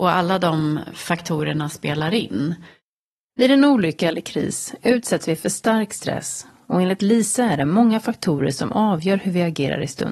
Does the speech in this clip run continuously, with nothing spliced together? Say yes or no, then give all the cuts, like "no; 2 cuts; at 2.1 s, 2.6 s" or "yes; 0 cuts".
yes; 0 cuts